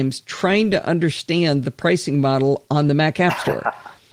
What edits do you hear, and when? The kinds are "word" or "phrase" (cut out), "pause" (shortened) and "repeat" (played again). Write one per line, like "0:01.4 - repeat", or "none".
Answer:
none